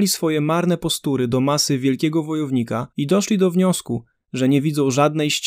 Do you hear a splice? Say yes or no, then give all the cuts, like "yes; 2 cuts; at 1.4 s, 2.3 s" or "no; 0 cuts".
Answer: yes; 1 cut; at 2.9 s